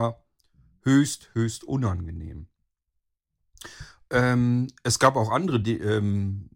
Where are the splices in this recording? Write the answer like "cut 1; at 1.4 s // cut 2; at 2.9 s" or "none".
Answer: none